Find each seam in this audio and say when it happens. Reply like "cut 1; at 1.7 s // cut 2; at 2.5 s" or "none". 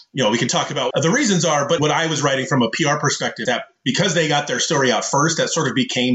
cut 1; at 0.9 s // cut 2; at 1.8 s // cut 3; at 3.5 s